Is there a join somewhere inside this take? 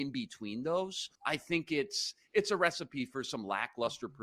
yes; 1 cut; at 1.2 s

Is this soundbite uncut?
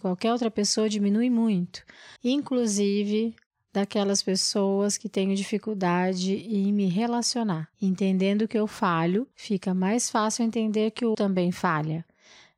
no; 4 cuts; at 2.2 s, 7.7 s, 9.3 s, 11.1 s

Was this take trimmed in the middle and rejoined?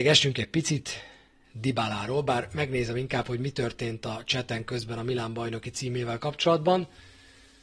no; 0 cuts

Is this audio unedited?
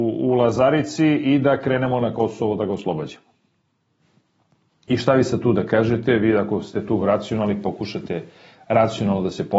yes; 0 cuts

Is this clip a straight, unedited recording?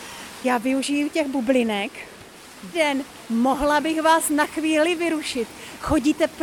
no; 1 cut; at 2.7 s

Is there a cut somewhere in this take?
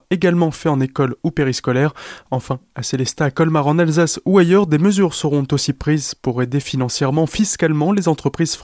no; 0 cuts

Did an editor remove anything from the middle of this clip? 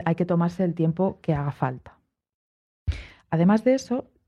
no; 0 cuts

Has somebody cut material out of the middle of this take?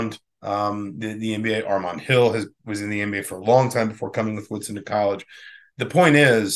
no; 0 cuts

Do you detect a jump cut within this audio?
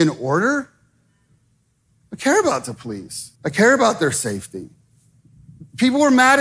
yes; 1 cut; at 3.4 s

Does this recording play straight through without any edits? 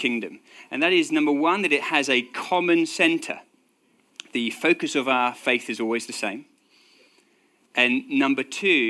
yes; 0 cuts

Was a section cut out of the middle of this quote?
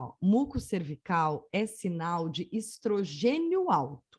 no; 0 cuts

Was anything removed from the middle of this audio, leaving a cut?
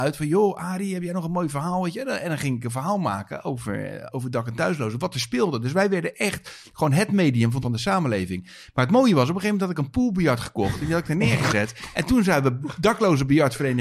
yes; 2 cuts; at 4.1 s, 7.6 s

